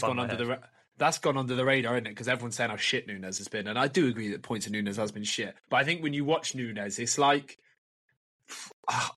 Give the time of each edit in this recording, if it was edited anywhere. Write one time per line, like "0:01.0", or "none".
0:05.6